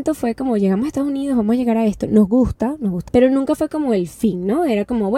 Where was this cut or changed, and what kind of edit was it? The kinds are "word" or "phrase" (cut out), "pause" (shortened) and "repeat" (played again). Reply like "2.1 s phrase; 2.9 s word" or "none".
3.1 s word